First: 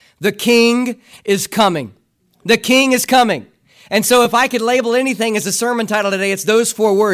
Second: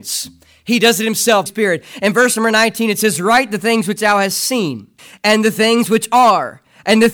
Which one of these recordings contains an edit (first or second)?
second